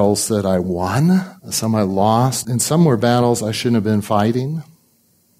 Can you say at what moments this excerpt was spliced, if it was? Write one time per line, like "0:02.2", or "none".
0:01.4
0:02.4